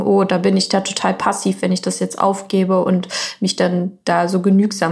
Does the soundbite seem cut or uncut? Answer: uncut